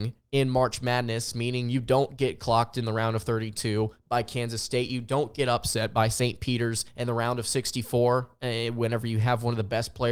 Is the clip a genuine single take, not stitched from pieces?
no; 1 cut; at 6.9 s

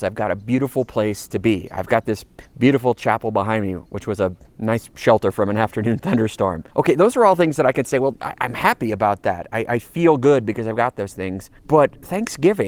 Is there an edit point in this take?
yes; 3 cuts; at 2.4 s, 6.7 s, 11.6 s

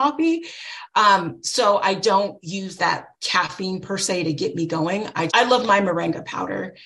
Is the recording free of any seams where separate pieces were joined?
no; 2 cuts; at 2.8 s, 5.3 s

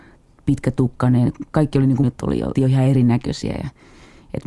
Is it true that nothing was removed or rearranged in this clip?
no; 2 cuts; at 2.0 s, 2.6 s

